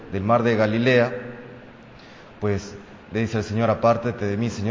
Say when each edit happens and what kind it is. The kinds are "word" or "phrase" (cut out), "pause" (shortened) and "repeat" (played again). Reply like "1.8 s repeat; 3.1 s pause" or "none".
3.0 s pause